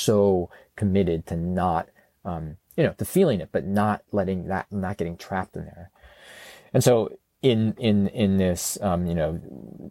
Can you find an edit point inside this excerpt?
no; 0 cuts

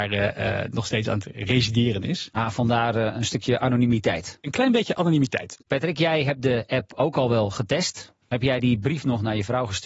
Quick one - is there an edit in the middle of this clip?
yes; 1 cut; at 5.6 s

